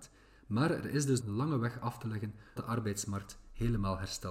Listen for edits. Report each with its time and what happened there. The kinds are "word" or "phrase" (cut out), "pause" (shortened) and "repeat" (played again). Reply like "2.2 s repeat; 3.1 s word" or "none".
1.2 s word; 2.6 s word